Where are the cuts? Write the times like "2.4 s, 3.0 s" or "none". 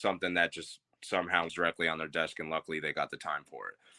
1.5 s